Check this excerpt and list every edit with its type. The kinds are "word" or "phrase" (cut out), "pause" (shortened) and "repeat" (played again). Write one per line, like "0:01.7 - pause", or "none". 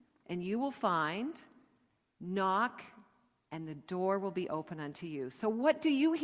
none